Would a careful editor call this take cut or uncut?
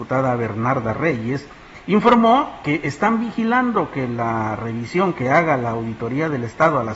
cut